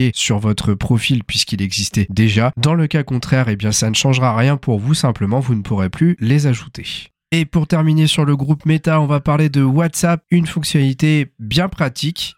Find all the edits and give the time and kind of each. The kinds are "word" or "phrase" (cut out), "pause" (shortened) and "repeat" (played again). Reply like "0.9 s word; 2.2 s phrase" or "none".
none